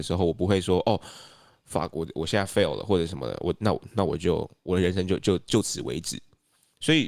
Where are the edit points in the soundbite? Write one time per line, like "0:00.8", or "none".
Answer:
none